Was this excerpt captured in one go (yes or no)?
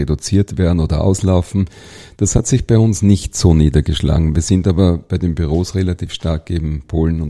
yes